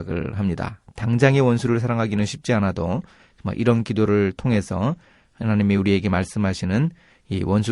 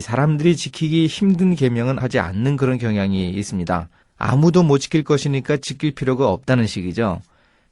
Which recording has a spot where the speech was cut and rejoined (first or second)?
second